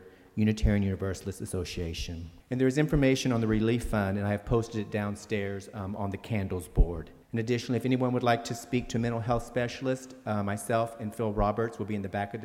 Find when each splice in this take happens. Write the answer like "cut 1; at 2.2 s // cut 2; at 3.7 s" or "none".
cut 1; at 2.4 s // cut 2; at 7.2 s